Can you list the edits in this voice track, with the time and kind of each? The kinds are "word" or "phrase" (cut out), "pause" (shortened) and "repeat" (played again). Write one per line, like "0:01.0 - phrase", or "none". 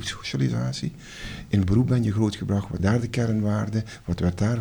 0:01.6 - word
0:02.8 - word